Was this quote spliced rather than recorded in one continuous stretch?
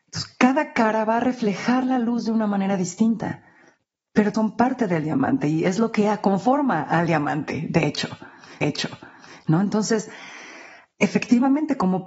yes; 2 cuts; at 4.3 s, 8.6 s

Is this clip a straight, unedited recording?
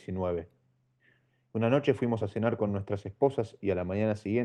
yes; 0 cuts

